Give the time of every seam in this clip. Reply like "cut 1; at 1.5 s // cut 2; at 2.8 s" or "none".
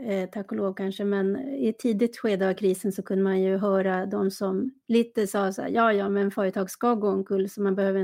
none